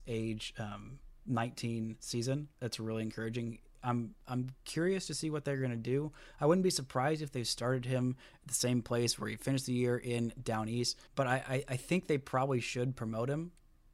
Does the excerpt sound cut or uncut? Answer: cut